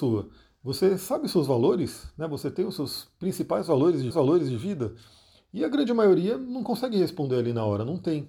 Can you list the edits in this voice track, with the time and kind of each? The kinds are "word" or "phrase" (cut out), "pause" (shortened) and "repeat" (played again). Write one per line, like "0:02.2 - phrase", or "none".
0:04.1 - repeat